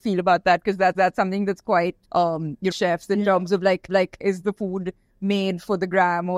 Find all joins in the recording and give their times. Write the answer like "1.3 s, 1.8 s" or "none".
0.9 s, 2.0 s, 2.7 s, 3.9 s